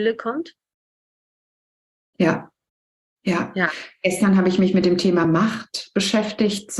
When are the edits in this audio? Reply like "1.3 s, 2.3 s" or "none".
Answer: none